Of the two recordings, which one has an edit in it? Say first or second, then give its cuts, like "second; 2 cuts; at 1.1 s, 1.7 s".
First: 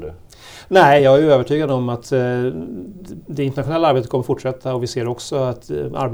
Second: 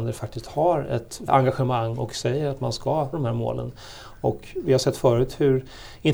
second; 2 cuts; at 1.3 s, 3.1 s